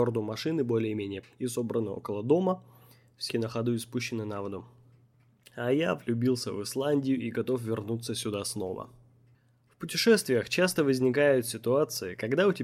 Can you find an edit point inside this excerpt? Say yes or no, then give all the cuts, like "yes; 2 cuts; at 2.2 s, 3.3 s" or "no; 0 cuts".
yes; 2 cuts; at 1.2 s, 3.3 s